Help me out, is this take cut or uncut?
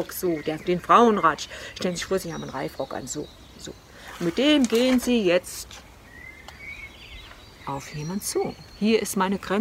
uncut